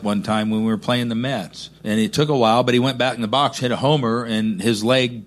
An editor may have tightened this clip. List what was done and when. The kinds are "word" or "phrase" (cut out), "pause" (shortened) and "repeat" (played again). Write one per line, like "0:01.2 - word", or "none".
0:01.8 - pause